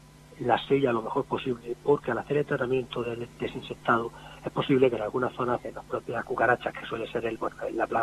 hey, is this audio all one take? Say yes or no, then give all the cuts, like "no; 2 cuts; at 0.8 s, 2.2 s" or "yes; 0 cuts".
no; 1 cut; at 5.6 s